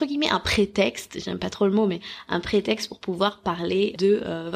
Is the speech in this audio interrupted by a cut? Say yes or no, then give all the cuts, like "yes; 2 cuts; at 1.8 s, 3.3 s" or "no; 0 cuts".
no; 0 cuts